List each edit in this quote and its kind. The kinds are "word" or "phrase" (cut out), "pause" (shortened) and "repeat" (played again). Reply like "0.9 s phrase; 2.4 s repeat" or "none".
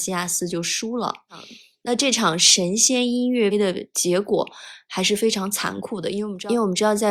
3.5 s word